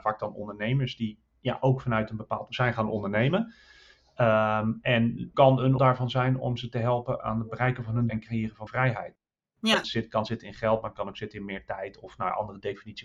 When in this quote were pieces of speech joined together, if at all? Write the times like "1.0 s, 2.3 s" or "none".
2.5 s, 5.3 s, 5.8 s, 8.1 s, 8.7 s, 9.8 s